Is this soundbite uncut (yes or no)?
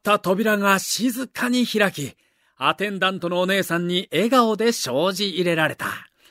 yes